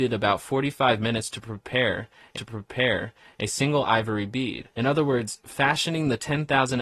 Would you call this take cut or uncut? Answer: cut